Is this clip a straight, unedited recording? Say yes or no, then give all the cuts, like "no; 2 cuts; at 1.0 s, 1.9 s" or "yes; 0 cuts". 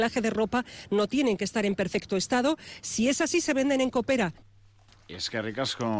yes; 0 cuts